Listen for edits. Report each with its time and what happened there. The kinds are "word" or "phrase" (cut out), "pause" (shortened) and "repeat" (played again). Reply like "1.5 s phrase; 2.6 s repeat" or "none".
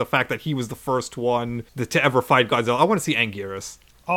1.7 s pause